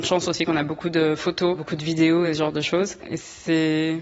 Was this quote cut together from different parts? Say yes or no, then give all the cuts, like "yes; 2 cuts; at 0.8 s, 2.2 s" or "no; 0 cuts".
no; 0 cuts